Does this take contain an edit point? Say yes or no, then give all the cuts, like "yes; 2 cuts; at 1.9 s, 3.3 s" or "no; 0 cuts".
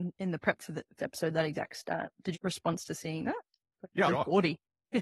yes; 3 cuts; at 1.0 s, 2.3 s, 4.1 s